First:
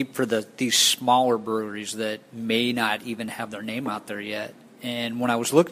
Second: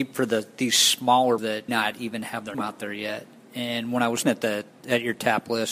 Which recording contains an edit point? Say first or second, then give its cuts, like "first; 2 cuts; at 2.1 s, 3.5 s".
second; 4 cuts; at 1.4 s, 1.7 s, 2.5 s, 4.2 s